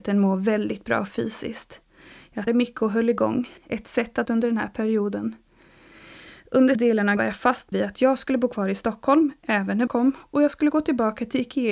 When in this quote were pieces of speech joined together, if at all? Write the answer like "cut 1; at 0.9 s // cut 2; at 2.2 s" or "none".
cut 1; at 2.5 s // cut 2; at 3.6 s // cut 3; at 4.2 s // cut 4; at 6.7 s // cut 5; at 7.2 s // cut 6; at 7.7 s // cut 7; at 9.9 s